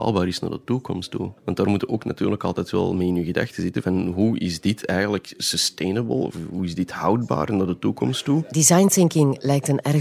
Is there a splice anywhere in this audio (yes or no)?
yes